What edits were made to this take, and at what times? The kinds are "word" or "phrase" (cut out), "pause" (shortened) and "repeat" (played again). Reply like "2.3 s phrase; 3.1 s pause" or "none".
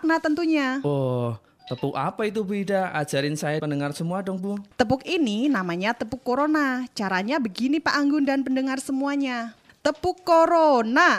3.6 s word